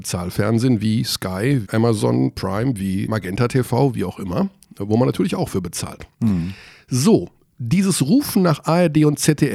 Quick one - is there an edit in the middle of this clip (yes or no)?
yes